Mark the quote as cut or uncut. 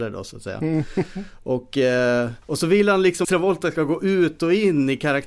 cut